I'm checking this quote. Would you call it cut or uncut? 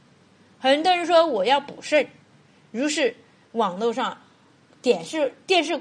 uncut